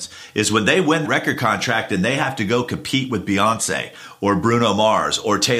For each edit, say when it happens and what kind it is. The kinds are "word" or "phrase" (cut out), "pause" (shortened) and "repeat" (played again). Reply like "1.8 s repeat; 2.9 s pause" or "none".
1.0 s word